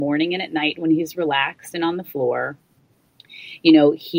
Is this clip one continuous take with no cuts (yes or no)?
yes